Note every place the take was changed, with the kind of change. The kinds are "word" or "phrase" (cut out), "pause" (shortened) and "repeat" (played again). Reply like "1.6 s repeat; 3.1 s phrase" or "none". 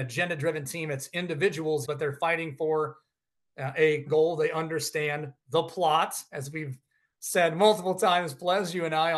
1.8 s word; 4.1 s word